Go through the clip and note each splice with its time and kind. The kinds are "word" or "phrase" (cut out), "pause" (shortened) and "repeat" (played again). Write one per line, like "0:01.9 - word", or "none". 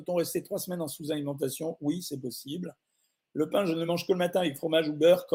none